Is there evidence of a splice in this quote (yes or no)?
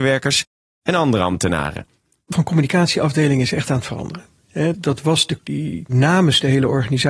yes